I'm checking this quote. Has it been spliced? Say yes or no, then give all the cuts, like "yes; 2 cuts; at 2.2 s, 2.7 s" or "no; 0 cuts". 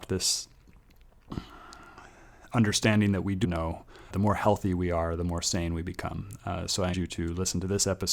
yes; 3 cuts; at 3.4 s, 4.1 s, 6.9 s